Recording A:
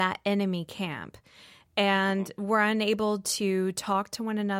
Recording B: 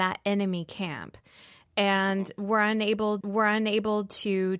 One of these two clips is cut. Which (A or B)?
B